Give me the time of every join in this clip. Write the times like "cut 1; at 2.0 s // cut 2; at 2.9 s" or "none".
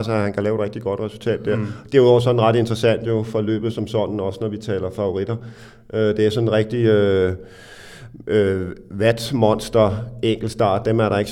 none